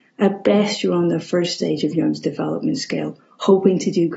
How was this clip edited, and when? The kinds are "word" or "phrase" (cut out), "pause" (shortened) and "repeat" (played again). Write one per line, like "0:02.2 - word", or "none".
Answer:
none